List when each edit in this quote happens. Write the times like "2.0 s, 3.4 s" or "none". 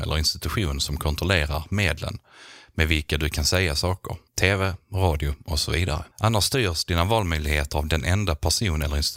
4.3 s, 6.1 s